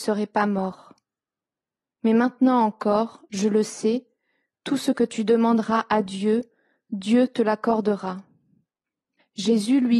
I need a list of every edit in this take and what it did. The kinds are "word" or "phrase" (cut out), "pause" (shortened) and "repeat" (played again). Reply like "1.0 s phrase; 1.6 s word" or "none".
none